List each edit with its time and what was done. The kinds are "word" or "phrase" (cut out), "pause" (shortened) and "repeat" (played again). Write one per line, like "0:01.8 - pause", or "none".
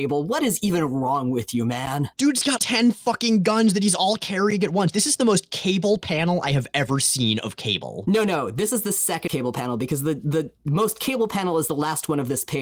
0:02.1 - pause
0:02.6 - word
0:09.3 - word